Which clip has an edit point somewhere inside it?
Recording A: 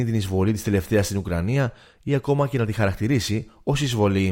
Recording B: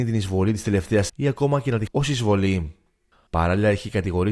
B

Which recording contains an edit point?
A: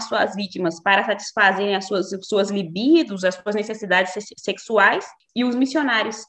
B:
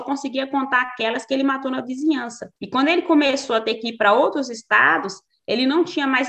B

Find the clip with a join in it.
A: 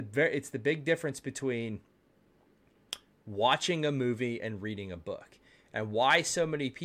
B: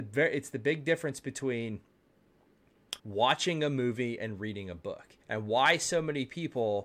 B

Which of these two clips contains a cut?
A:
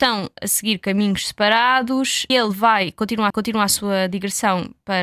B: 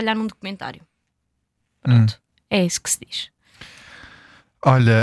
A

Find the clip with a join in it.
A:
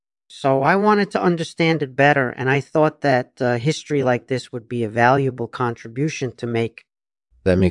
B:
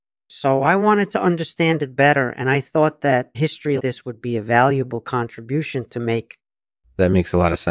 B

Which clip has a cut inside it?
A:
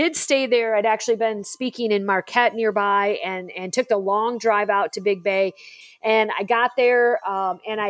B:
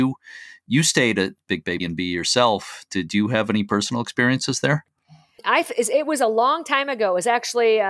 B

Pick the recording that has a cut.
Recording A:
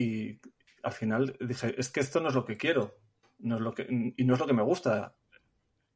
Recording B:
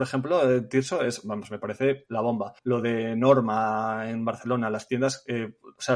B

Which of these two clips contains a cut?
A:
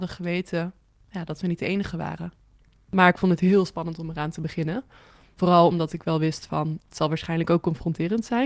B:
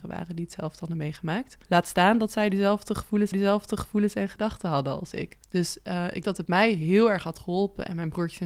B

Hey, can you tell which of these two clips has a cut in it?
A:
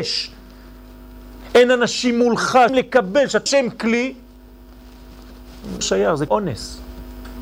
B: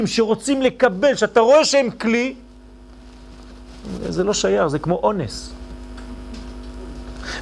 A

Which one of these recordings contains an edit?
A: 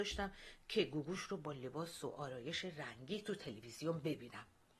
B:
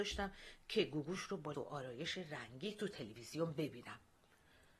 B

